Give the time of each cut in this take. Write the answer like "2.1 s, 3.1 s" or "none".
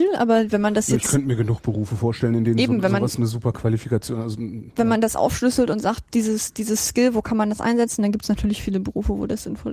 none